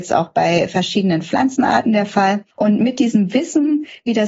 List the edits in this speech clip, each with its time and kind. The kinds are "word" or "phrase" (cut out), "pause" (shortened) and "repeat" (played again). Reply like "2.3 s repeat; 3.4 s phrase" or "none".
2.5 s pause